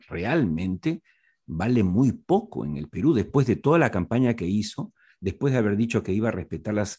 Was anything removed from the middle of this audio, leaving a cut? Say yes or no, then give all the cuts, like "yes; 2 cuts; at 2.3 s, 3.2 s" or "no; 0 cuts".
no; 0 cuts